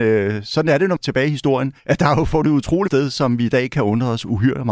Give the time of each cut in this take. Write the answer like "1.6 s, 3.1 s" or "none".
1.0 s, 1.8 s, 2.9 s